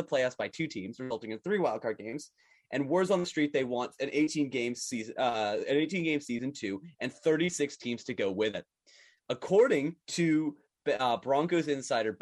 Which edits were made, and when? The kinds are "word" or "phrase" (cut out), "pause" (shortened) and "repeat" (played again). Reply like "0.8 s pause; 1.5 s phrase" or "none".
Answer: 10.0 s pause